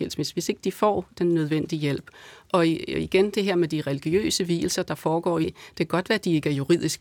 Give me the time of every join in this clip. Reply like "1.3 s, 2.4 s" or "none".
5.4 s